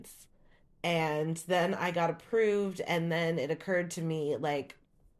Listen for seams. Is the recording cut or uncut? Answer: uncut